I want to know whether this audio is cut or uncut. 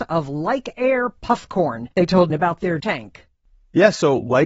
cut